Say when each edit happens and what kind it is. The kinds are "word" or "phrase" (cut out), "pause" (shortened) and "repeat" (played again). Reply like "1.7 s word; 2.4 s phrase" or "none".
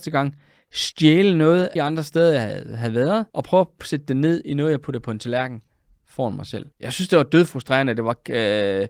1.8 s phrase; 3.3 s pause; 6.7 s pause